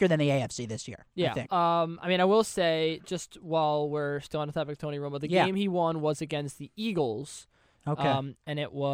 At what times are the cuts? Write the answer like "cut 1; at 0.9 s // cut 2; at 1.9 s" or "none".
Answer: cut 1; at 1.5 s